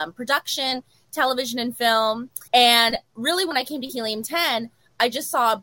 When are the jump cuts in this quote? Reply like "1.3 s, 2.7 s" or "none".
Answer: 2.5 s